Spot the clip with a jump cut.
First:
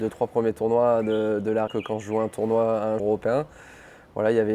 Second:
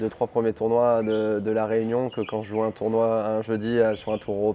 first; 2 cuts; at 1.7 s, 3.0 s

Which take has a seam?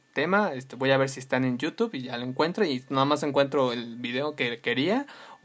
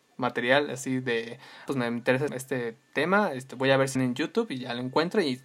second; 3 cuts; at 1.7 s, 2.3 s, 3.9 s

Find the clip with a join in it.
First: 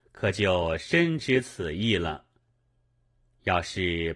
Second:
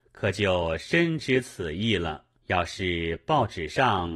second; 1 cut; at 2.4 s

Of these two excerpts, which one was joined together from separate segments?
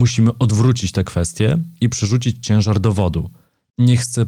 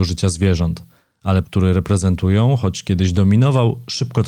second; 1 cut; at 1.4 s

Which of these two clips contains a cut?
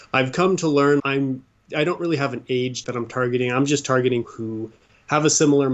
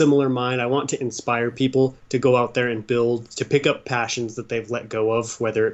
first; 3 cuts; at 1.0 s, 2.8 s, 4.2 s

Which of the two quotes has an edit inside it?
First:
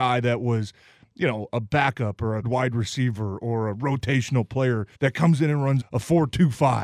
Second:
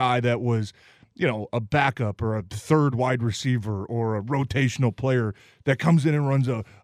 first; 3 cuts; at 2.4 s, 4.9 s, 5.8 s

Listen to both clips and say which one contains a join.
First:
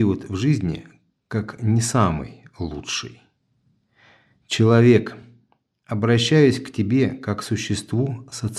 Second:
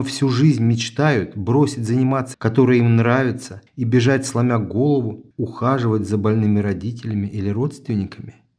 second; 3 cuts; at 2.3 s, 3.7 s, 5.3 s

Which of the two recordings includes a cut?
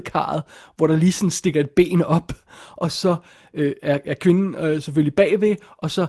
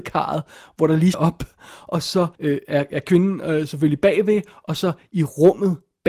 second; 2 cuts; at 1.1 s, 2.3 s

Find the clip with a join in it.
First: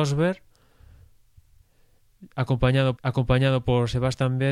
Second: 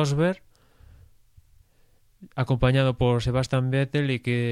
first; 1 cut; at 3.0 s

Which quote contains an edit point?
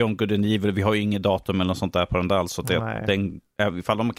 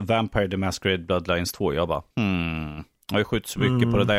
second; 1 cut; at 2.1 s

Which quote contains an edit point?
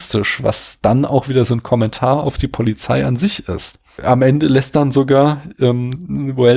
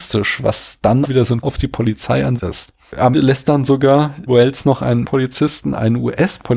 second; 6 cuts; at 1.0 s, 1.4 s, 2.4 s, 3.1 s, 4.3 s, 5.0 s

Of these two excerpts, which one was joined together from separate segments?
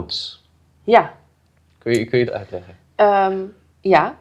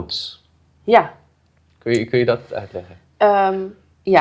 first; 1 cut; at 2.3 s

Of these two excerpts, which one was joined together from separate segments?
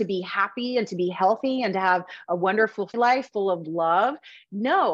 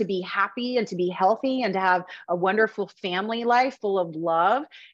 first; 1 cut; at 2.9 s

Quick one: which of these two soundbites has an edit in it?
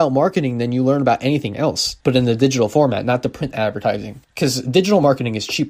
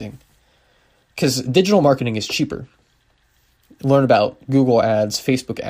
first; 2 cuts; at 2.0 s, 4.2 s

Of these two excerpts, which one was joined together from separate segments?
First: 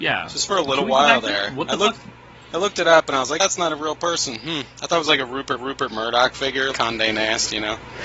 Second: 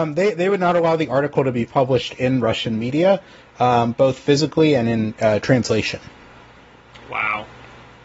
first; 4 cuts; at 1.9 s, 3.4 s, 5.6 s, 6.7 s

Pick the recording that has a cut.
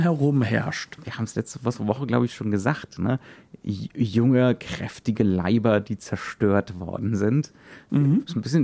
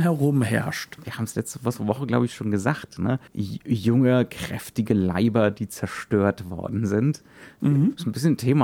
second; 1 cut; at 3.3 s

